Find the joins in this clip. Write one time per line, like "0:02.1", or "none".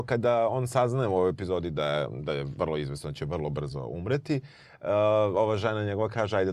none